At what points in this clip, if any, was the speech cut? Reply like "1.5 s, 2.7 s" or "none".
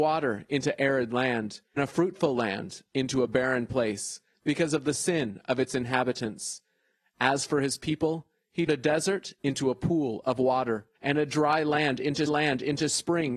1.8 s, 8.7 s, 10.9 s, 12.3 s